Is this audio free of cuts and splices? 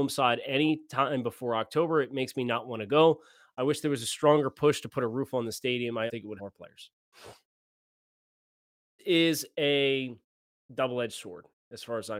no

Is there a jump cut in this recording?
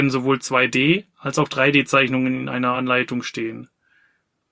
no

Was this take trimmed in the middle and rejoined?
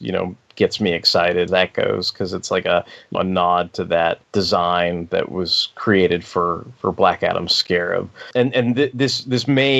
yes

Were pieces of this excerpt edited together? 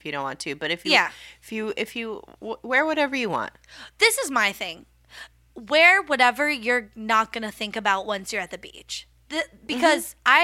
no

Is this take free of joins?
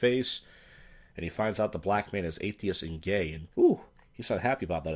no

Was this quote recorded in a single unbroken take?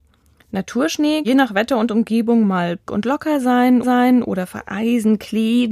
no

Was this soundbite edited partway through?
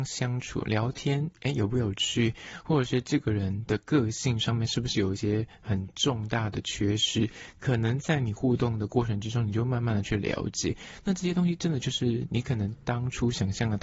no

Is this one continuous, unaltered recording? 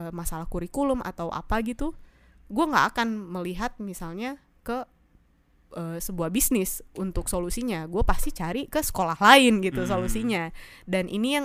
yes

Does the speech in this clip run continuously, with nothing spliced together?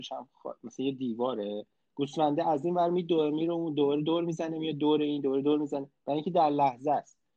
yes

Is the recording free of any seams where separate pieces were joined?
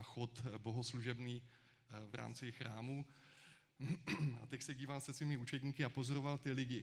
yes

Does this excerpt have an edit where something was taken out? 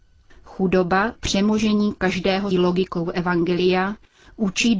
yes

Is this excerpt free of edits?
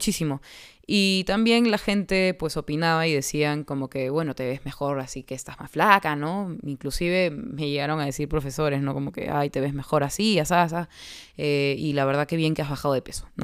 yes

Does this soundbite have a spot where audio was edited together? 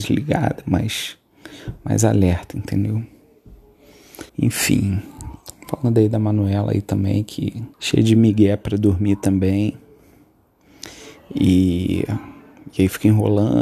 yes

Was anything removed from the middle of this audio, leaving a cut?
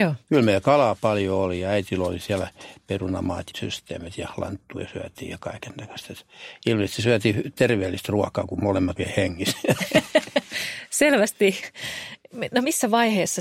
yes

